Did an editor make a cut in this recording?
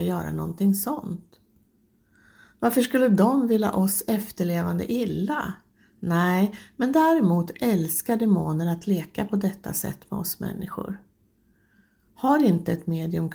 no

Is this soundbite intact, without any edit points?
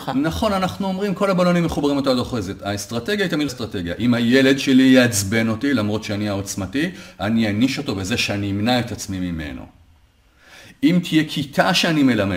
no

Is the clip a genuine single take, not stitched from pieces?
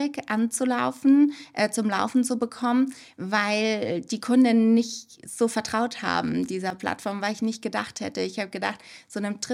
yes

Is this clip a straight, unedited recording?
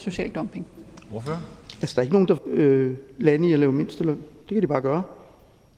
no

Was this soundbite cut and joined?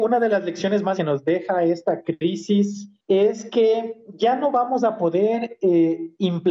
yes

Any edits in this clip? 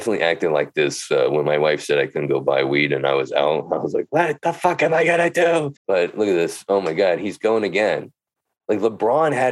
yes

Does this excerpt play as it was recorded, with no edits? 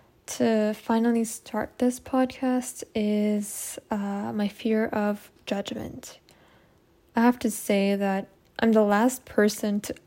yes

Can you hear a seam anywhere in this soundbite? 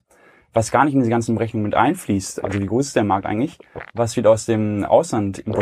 no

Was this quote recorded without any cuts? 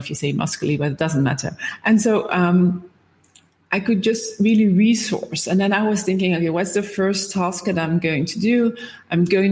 yes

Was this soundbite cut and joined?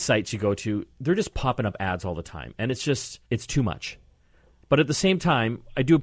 yes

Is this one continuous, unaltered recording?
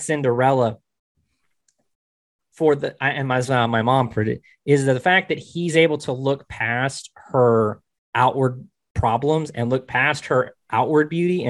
yes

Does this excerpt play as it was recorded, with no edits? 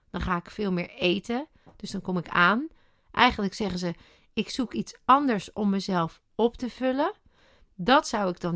yes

